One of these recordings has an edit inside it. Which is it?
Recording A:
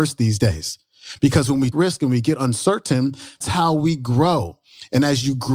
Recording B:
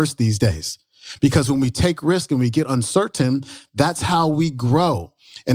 A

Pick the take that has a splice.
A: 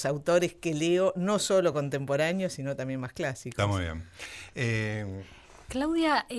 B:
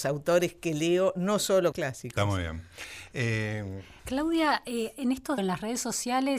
B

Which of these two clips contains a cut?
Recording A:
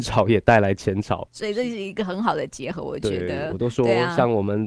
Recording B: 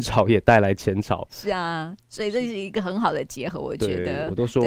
A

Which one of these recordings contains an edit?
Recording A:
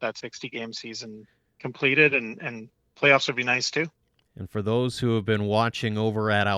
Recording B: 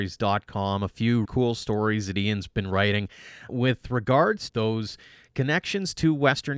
B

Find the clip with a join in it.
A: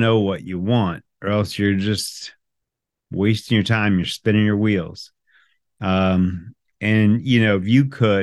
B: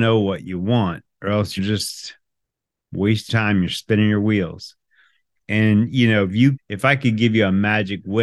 B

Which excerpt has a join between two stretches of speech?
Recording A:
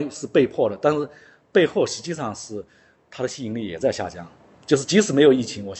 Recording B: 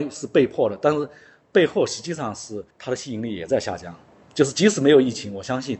B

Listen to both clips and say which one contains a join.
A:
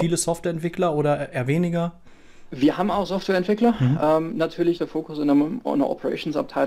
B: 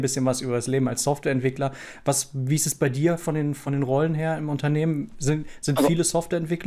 A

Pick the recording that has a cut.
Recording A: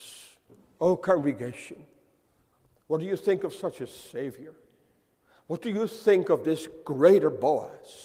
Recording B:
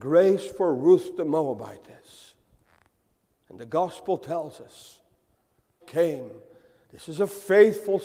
B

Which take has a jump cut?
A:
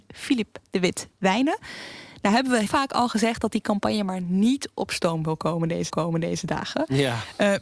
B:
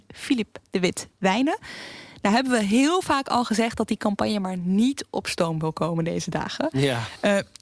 A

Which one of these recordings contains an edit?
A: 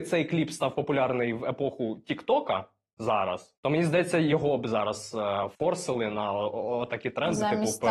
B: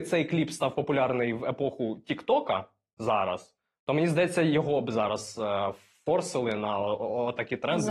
A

